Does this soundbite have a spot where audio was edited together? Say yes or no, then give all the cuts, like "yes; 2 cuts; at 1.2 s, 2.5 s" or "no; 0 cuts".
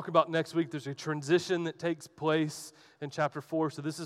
no; 0 cuts